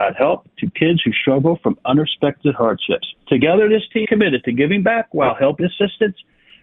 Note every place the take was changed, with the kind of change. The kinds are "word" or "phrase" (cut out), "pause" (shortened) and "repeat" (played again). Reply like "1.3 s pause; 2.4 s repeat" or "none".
4.0 s word; 5.6 s phrase